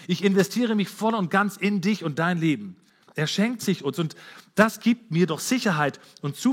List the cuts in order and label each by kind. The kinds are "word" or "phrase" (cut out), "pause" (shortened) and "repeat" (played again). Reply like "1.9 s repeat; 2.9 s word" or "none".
2.9 s pause

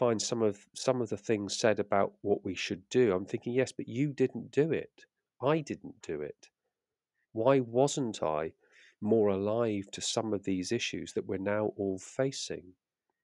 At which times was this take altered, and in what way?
none

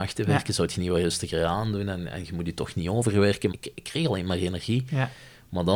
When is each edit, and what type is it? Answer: 3.5 s word

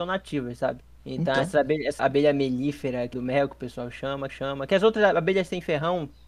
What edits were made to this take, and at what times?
1.0 s pause; 2.0 s word; 3.1 s phrase; 4.3 s repeat

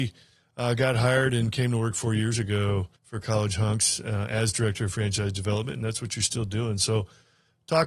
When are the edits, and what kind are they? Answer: 3.0 s pause

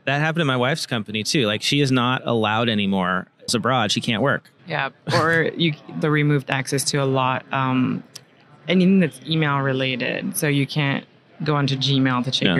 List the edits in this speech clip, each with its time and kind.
3.5 s phrase; 4.6 s pause; 6.0 s word; 7.4 s word

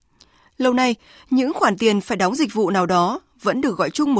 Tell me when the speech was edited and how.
none

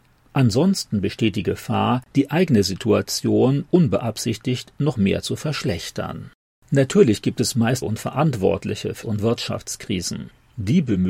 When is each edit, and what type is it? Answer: 6.5 s pause; 7.8 s phrase; 9.0 s word

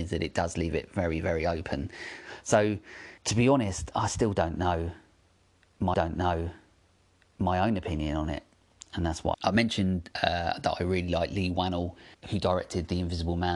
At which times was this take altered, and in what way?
3.2 s pause; 5.9 s repeat; 9.3 s phrase; 10.1 s pause; 12.1 s word

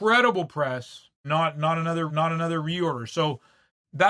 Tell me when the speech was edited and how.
1.2 s word; 2.1 s repeat

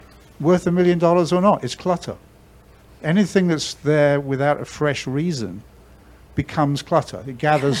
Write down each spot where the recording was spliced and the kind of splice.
none

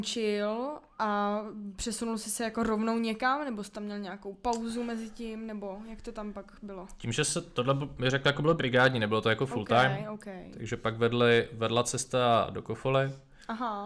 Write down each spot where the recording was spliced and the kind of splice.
none

